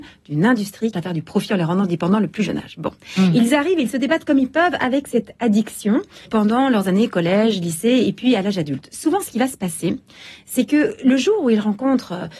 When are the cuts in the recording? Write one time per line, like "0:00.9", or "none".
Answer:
0:00.9
0:06.3